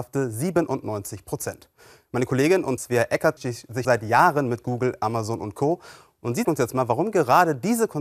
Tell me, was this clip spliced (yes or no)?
yes